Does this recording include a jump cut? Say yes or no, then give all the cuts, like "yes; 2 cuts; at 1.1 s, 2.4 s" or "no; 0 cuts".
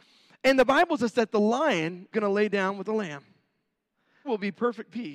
yes; 3 cuts; at 1.0 s, 2.1 s, 4.2 s